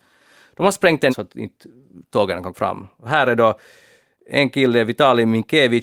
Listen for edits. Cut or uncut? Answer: cut